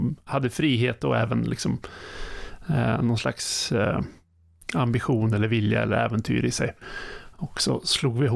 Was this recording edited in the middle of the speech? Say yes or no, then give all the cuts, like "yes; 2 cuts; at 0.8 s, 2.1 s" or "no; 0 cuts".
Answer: no; 0 cuts